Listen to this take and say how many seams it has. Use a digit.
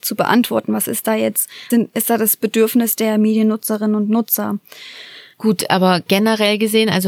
1